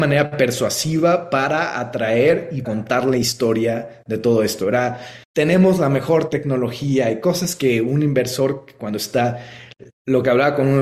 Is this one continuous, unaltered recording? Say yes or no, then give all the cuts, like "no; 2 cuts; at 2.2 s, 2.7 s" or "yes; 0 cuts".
no; 2 cuts; at 2.6 s, 5.2 s